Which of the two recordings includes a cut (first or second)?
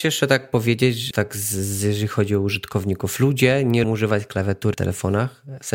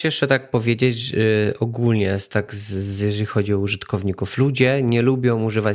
first